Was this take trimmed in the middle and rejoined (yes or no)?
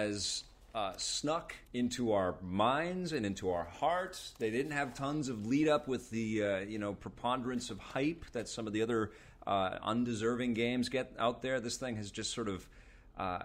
yes